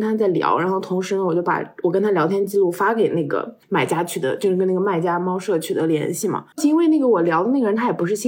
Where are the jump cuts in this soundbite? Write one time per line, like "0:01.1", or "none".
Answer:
0:03.6
0:06.5